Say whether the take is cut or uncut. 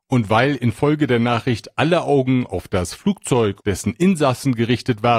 cut